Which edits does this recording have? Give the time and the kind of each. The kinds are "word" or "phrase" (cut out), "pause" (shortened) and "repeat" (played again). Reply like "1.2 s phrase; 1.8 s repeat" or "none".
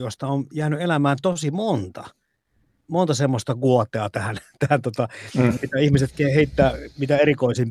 none